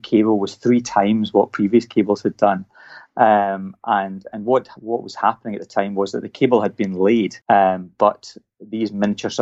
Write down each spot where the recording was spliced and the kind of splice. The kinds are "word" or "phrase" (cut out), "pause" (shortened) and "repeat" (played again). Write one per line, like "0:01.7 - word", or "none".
0:07.4 - pause